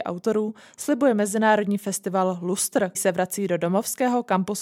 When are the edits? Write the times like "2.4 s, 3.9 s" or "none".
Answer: 2.9 s